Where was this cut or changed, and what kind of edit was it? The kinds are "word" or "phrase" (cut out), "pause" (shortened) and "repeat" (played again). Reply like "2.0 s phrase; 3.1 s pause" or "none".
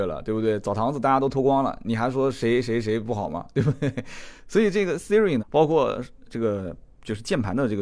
5.4 s word